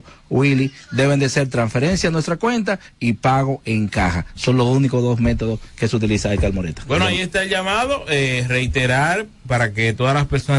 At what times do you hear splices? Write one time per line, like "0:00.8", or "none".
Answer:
none